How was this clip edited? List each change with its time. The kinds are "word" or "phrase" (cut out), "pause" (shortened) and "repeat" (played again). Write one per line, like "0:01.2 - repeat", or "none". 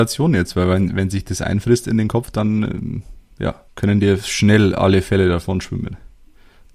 0:03.7 - pause

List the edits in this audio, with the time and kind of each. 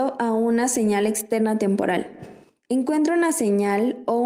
0:02.4 - pause

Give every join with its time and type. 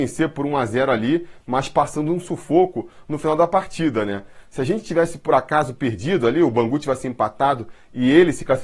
none

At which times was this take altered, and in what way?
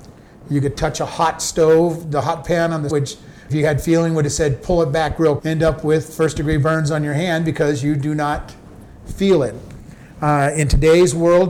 0:02.9 - word
0:03.5 - word
0:05.4 - word

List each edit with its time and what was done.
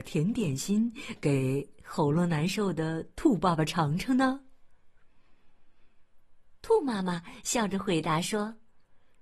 none

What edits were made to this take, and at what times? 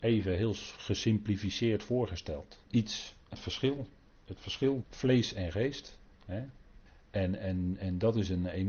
0:02.7 - pause
0:03.3 - word
0:04.8 - word
0:06.9 - pause

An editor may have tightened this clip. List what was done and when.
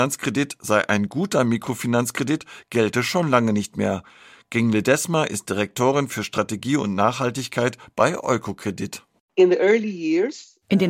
none

